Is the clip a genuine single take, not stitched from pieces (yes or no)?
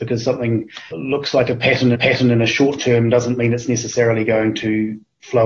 no